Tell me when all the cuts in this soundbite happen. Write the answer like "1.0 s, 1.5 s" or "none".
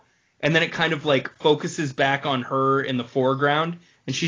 none